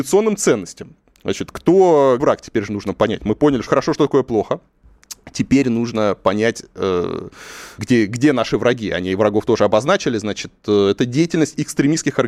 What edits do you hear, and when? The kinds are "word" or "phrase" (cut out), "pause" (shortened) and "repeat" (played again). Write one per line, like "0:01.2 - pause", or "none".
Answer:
0:02.2 - word
0:03.7 - word
0:07.8 - word

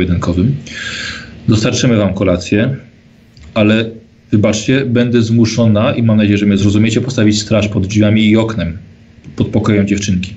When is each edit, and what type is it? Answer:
none

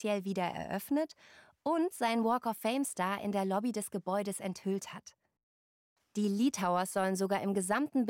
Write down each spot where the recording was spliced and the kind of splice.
none

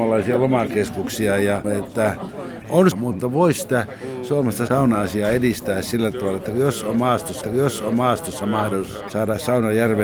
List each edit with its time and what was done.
0:01.6 - word
0:02.9 - word
0:04.7 - word
0:07.4 - repeat

